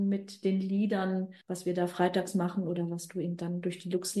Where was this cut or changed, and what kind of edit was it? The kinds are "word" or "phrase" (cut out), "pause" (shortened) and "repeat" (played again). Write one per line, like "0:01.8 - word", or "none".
0:01.4 - pause